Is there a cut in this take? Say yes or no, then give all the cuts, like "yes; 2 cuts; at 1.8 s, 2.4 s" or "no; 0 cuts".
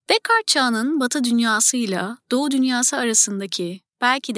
no; 0 cuts